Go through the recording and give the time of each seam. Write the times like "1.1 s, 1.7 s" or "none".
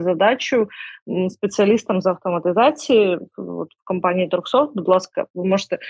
none